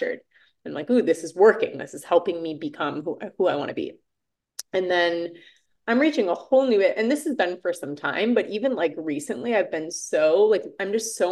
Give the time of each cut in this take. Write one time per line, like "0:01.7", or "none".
none